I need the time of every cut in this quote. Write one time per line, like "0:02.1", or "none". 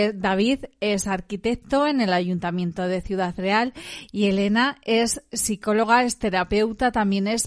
none